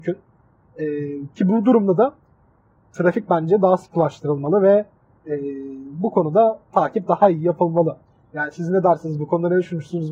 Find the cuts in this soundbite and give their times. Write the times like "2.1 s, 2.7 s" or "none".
none